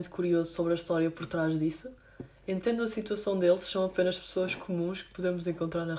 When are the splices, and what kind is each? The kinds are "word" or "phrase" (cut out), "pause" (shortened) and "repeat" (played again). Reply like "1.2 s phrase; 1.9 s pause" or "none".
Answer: none

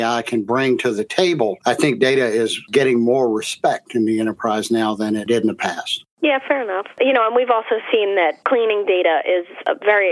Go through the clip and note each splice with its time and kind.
none

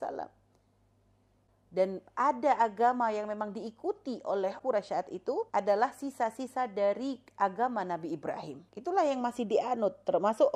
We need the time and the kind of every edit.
4.6 s word; 5.5 s pause; 8.7 s pause

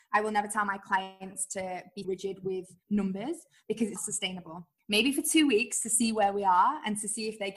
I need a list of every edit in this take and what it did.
2.0 s word; 4.0 s word

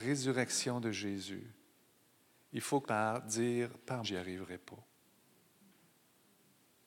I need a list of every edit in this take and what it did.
2.8 s word; 4.0 s word

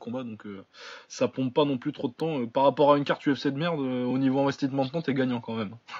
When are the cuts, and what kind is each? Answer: none

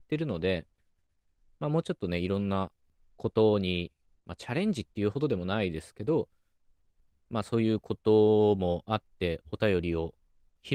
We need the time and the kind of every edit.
none

